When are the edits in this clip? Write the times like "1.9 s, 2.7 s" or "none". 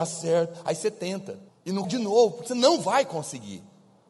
1.5 s, 1.8 s, 2.5 s